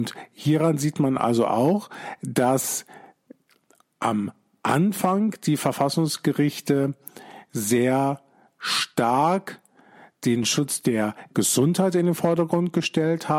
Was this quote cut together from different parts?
no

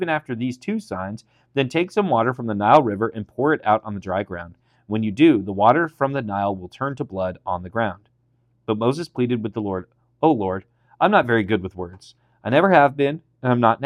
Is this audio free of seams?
yes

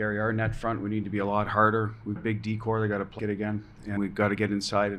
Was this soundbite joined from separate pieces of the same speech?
yes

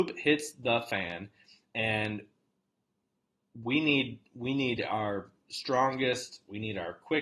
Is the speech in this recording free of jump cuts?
yes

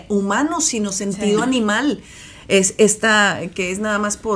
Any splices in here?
no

